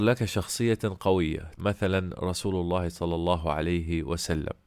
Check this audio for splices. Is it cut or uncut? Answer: cut